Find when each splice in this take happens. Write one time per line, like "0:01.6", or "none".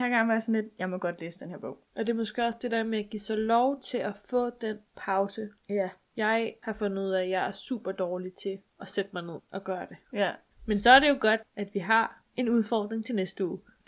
none

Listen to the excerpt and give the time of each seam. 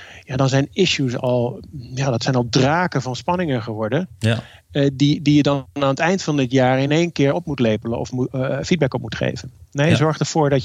none

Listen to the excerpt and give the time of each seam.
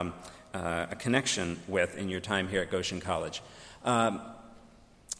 none

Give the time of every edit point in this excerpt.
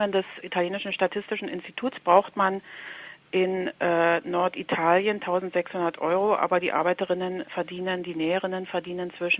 none

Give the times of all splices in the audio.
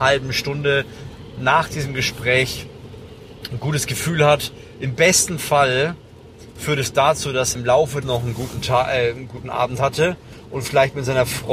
0:07.6
0:08.0

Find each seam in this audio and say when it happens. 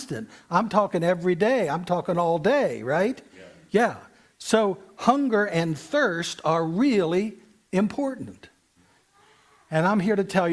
none

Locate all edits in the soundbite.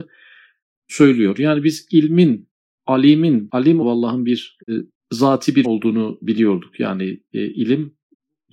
0:03.8
0:04.6
0:05.6

